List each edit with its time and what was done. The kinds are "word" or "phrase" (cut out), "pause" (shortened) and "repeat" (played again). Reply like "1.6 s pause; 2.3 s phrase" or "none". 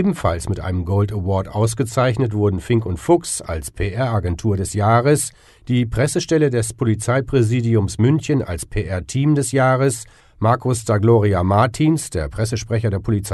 none